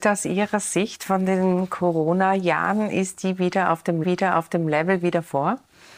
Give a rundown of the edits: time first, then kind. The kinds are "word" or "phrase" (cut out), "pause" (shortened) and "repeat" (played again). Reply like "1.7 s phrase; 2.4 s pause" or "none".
4.0 s repeat